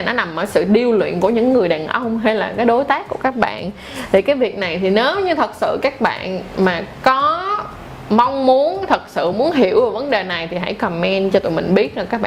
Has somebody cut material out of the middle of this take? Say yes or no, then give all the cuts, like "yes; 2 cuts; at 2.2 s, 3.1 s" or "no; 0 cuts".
no; 0 cuts